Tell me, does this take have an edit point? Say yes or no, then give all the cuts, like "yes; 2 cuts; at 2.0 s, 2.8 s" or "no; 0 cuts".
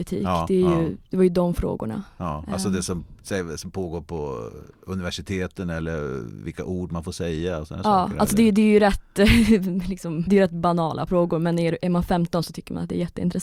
yes; 2 cuts; at 10.3 s, 11.1 s